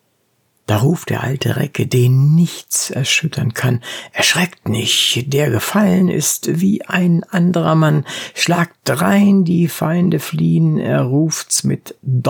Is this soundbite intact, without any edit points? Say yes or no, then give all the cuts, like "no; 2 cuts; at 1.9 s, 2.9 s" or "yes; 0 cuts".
yes; 0 cuts